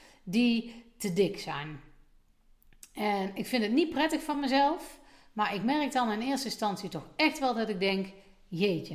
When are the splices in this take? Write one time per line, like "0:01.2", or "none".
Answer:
none